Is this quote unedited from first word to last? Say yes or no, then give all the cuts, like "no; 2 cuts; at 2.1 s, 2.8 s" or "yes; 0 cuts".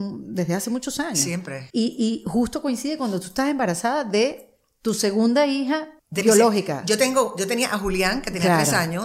no; 2 cuts; at 1.7 s, 6.0 s